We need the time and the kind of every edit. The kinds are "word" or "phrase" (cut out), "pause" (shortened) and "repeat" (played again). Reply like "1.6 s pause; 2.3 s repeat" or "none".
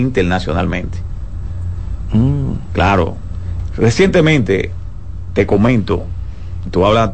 none